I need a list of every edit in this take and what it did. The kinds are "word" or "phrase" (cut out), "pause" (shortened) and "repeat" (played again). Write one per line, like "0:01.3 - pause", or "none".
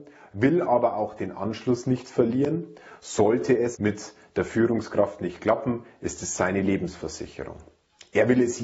0:03.7 - word